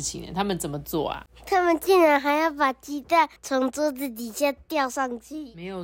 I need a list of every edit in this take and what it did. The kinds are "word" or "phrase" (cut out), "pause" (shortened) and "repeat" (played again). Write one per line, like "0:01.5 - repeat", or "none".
0:03.4 - pause